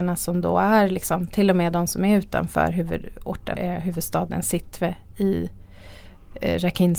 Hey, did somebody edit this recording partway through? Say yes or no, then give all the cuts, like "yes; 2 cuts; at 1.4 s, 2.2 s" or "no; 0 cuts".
yes; 1 cut; at 3.6 s